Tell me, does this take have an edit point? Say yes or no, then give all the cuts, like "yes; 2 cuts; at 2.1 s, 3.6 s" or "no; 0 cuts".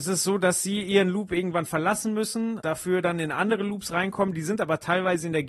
yes; 1 cut; at 2.6 s